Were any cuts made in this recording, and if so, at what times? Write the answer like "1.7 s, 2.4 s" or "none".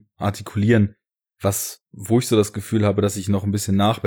1.9 s